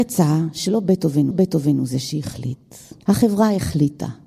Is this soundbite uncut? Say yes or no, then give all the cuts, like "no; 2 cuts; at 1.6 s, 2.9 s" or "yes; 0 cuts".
no; 2 cuts; at 1.3 s, 3.0 s